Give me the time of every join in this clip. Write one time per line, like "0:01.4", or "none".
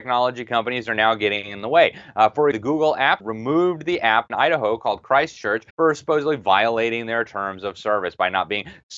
0:02.5
0:03.2
0:04.3
0:05.7